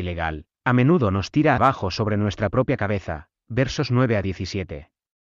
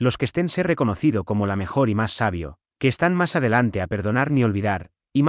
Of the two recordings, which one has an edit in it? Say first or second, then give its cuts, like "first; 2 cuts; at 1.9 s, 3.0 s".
first; 1 cut; at 1.6 s